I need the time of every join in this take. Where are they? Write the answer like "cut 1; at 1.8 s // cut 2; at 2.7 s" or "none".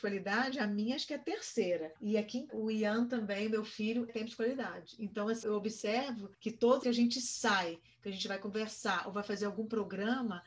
cut 1; at 2.0 s // cut 2; at 2.5 s // cut 3; at 4.1 s // cut 4; at 5.4 s // cut 5; at 6.3 s // cut 6; at 6.8 s